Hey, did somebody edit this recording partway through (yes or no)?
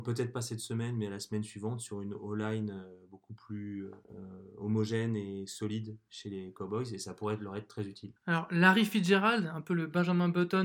yes